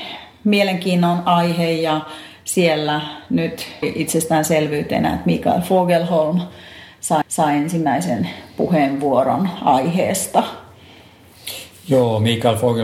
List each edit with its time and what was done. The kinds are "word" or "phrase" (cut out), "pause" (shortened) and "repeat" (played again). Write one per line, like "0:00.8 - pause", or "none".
0:03.8 - word
0:07.2 - repeat

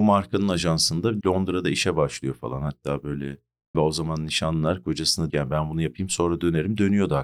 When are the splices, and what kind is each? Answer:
0:01.2 - word
0:03.7 - word
0:05.3 - word

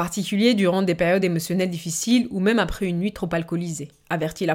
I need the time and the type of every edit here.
none

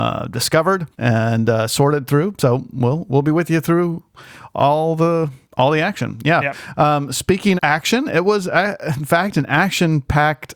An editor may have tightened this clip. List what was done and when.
0:00.9 - pause
0:05.4 - pause
0:07.6 - word

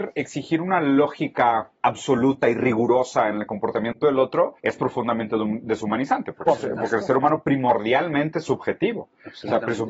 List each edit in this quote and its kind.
0:01.8 - pause
0:04.6 - pause

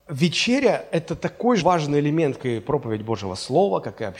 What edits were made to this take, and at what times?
0:01.6 - word
0:02.4 - word

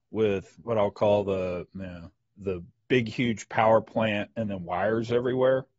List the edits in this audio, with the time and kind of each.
0:02.4 - word

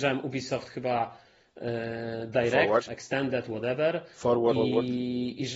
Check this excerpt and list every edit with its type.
0:02.9 - phrase
0:04.5 - word

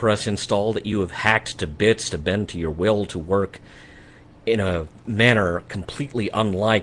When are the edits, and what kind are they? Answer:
none

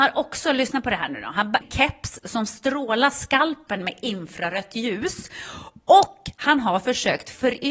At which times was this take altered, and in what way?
0:01.6 - phrase

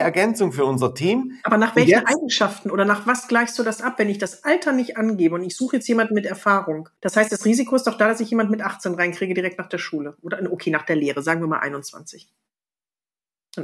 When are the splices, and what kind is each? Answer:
0:07.0 - pause

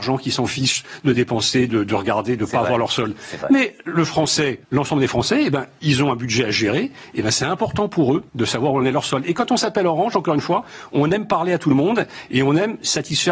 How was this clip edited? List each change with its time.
0:04.6 - pause
0:08.3 - pause

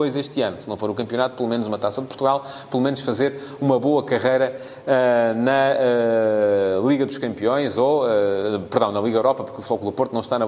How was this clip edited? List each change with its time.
none

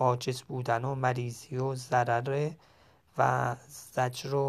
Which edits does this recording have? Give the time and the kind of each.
none

